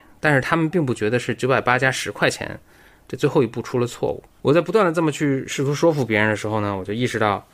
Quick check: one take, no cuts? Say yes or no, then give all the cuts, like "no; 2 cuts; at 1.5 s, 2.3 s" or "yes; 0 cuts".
no; 1 cut; at 4.3 s